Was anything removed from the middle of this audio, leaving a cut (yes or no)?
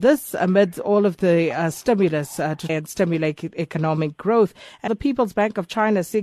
yes